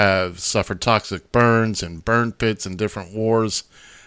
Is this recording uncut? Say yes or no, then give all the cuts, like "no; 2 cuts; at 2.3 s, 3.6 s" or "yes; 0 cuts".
yes; 0 cuts